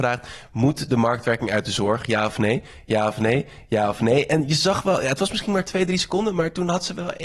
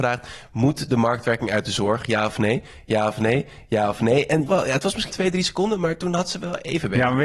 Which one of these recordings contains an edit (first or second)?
second